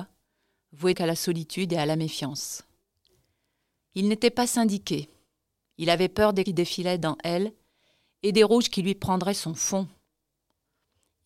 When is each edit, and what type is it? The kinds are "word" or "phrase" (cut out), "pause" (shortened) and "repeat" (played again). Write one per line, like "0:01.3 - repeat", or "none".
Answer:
0:00.9 - word
0:06.5 - phrase